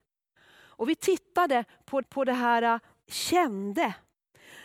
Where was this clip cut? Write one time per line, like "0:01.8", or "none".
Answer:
0:02.0
0:03.0